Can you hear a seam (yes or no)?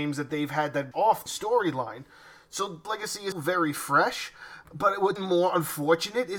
yes